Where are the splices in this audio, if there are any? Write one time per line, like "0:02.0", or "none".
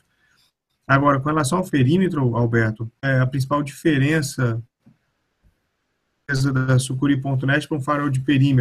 0:01.7
0:03.0

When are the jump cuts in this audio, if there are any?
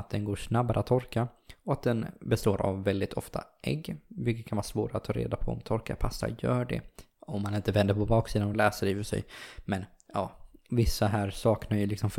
none

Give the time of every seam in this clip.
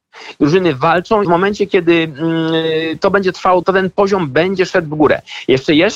0:01.2
0:03.6

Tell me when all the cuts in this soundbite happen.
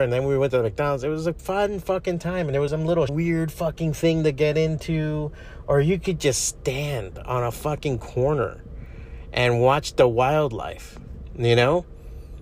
0:02.7
0:03.1

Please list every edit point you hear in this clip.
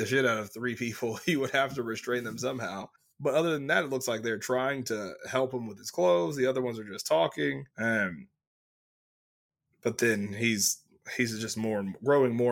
0:03.0
0:07.7

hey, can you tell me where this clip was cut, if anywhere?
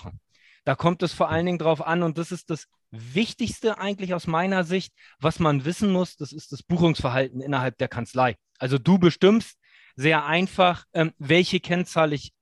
0:10.9

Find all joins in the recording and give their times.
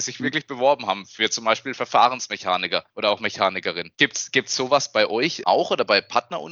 0:02.9
0:03.9
0:05.4

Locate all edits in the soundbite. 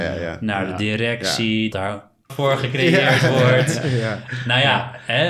0:01.7
0:02.3

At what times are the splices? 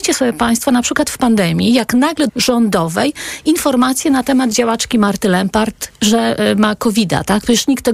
0:02.3

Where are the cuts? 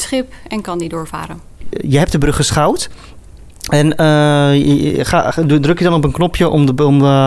none

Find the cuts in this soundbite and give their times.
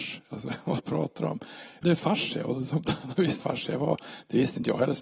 0:01.8
0:03.4

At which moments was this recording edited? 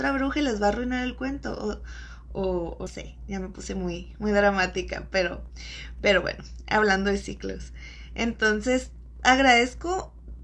0:02.9

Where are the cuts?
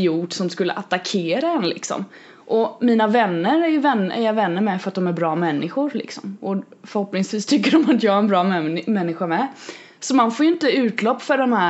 none

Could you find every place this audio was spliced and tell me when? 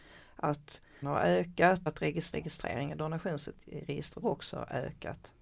0:01.0
0:01.9
0:02.3
0:04.2

